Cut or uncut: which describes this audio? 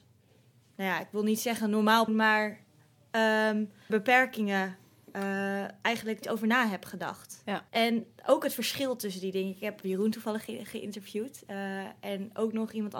cut